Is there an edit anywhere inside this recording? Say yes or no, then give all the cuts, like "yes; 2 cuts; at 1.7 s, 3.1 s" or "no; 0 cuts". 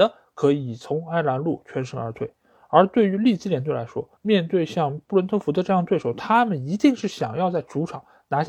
yes; 1 cut; at 4.2 s